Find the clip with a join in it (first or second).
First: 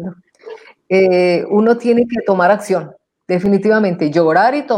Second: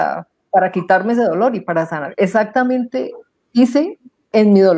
second